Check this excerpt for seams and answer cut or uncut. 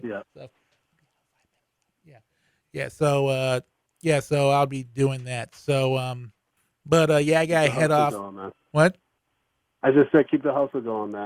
cut